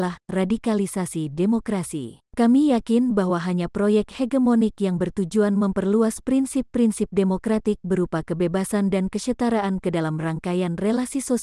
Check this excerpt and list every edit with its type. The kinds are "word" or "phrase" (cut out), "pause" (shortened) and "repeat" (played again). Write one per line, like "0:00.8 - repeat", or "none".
0:02.3 - pause